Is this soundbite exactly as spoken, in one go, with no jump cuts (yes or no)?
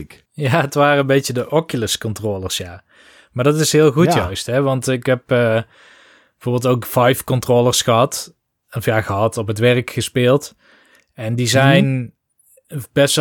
yes